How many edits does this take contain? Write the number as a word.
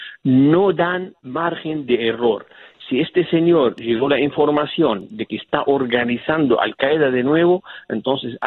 one